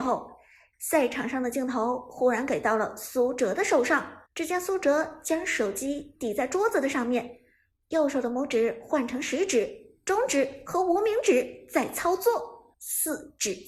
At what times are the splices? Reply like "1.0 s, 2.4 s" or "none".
4.3 s, 12.7 s